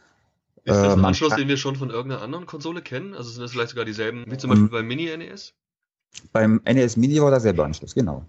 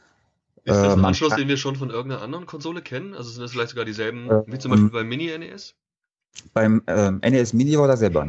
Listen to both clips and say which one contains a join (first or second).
first